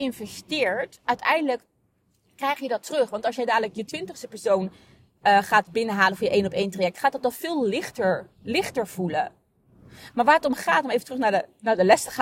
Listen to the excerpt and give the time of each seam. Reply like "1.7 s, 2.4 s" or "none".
none